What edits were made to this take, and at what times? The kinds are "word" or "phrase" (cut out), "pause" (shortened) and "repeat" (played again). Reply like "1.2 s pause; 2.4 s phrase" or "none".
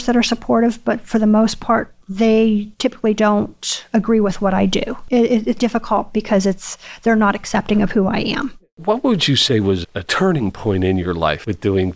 5.6 s word; 9.8 s word